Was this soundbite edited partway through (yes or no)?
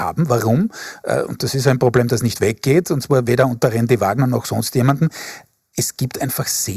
no